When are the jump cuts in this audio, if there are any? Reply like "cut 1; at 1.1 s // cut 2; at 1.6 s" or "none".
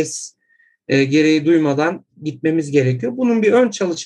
none